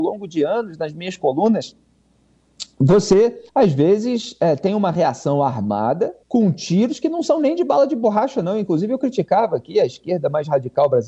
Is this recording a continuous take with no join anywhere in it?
no; 2 cuts; at 3.5 s, 6.2 s

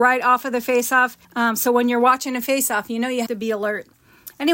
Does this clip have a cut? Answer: yes; 2 cuts; at 1.2 s, 3.3 s

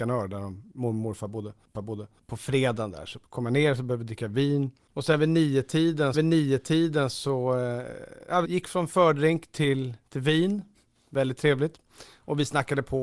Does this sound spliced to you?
yes; 3 cuts; at 1.7 s, 6.1 s, 8.4 s

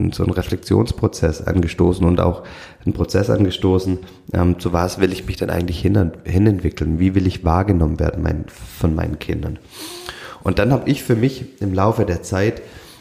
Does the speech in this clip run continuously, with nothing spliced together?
yes; 0 cuts

